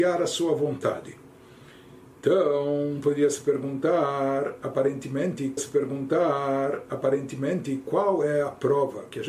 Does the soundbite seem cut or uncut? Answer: cut